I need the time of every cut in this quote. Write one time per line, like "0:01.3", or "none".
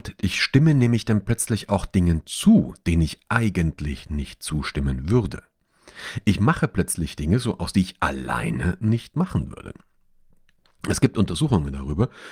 0:07.7

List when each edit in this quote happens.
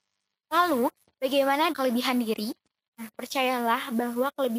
0:01.7

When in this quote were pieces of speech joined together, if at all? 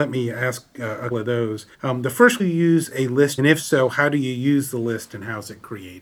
0:01.1
0:01.7
0:02.4
0:03.4

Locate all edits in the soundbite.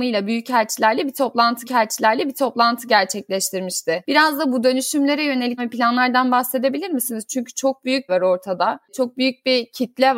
0:01.6
0:05.6
0:08.1

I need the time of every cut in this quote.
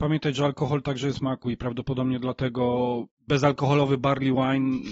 0:01.1
0:03.1

